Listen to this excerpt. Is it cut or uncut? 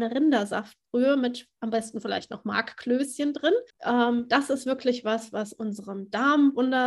cut